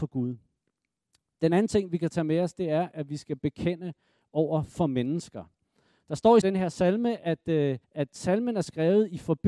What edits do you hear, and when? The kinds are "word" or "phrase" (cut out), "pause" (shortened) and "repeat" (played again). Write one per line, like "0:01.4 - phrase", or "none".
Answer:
0:06.4 - phrase
0:07.8 - pause